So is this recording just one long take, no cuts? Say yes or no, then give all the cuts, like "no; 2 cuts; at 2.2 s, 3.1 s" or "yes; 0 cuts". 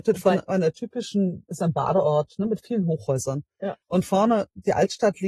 no; 1 cut; at 3.8 s